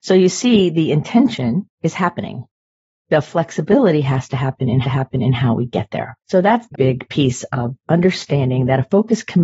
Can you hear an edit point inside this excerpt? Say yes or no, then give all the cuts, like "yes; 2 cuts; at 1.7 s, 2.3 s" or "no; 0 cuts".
yes; 6 cuts; at 1.7 s, 2.8 s, 4.8 s, 6.2 s, 6.7 s, 7.8 s